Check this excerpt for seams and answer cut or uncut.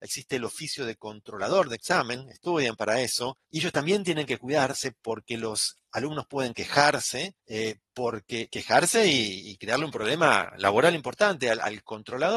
cut